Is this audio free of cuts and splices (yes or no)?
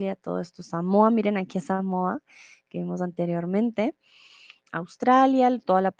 yes